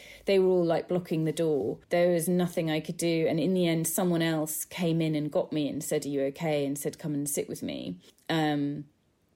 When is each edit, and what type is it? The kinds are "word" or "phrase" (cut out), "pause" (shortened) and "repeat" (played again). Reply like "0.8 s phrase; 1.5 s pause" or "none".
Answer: 1.8 s pause; 8.1 s pause